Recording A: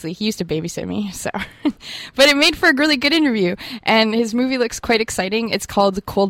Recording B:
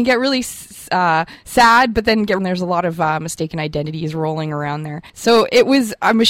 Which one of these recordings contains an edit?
B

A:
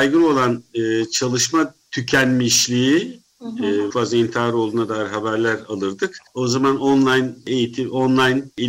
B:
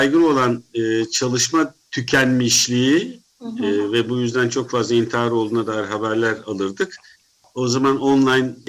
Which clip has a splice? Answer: A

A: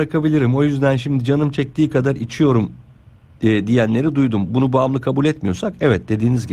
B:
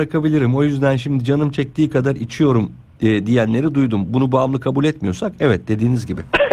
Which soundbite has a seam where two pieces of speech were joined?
B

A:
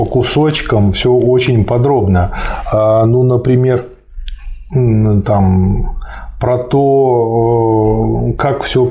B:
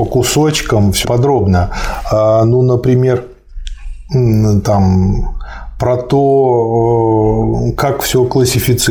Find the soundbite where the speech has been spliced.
B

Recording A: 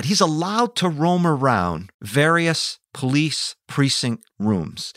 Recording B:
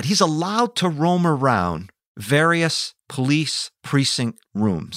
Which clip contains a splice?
A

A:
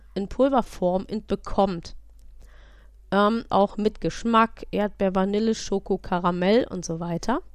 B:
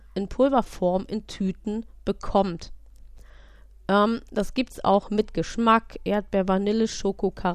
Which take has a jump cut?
A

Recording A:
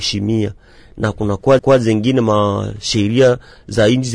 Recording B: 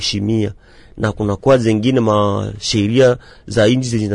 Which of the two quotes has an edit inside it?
A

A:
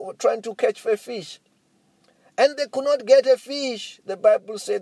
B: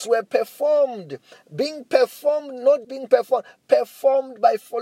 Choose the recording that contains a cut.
B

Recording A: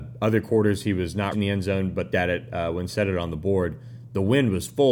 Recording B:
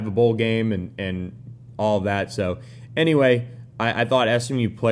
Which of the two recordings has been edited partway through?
A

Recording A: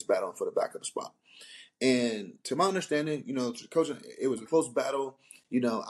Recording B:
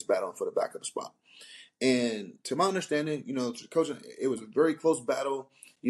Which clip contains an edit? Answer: A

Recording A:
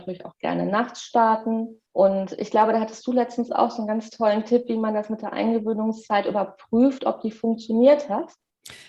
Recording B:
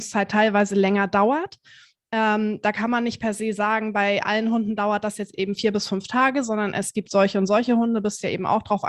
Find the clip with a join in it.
A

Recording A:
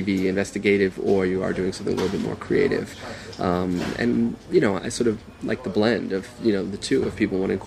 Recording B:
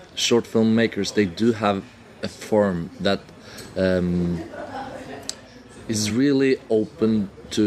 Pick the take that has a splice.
A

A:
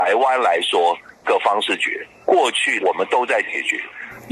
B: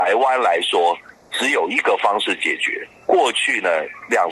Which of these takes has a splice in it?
A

